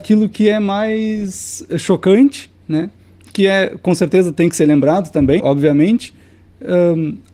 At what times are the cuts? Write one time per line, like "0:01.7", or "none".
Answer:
0:02.6
0:05.4